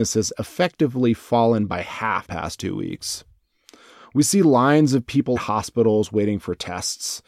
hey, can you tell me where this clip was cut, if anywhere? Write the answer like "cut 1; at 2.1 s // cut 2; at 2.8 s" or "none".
cut 1; at 2.2 s // cut 2; at 5.4 s